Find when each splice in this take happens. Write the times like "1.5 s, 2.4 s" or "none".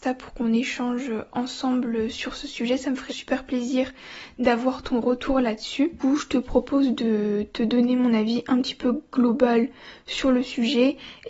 3.1 s